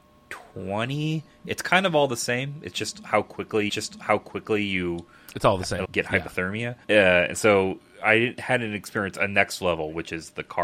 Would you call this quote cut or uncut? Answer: cut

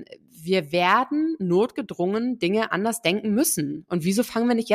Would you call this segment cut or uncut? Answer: uncut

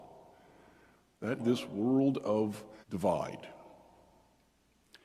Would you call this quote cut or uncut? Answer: cut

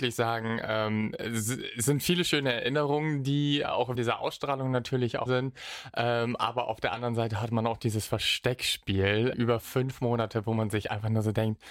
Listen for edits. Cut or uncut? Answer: cut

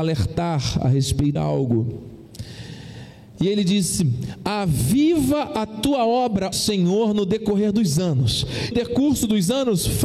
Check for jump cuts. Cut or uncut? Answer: cut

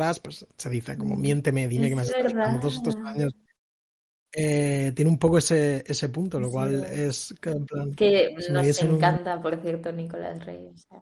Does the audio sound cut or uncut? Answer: uncut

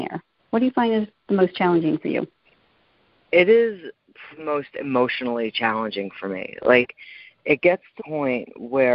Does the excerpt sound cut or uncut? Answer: cut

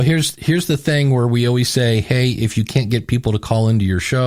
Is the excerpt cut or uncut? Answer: uncut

